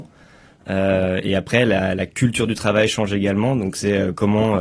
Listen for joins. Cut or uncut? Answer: uncut